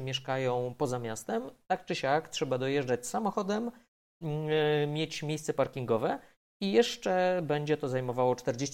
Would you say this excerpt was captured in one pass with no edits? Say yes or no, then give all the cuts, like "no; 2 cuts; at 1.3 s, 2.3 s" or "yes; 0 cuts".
yes; 0 cuts